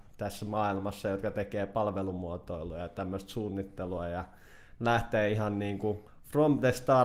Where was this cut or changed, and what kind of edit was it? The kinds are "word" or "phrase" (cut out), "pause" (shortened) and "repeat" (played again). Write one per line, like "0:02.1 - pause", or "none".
0:06.1 - pause